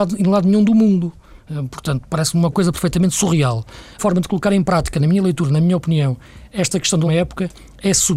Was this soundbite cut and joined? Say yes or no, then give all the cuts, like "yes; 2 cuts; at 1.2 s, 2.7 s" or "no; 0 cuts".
yes; 2 cuts; at 4.0 s, 7.1 s